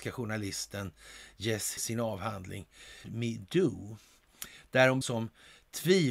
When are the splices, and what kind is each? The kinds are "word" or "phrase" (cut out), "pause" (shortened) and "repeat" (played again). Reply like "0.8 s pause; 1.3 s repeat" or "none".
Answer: 1.8 s word; 3.0 s phrase; 5.0 s phrase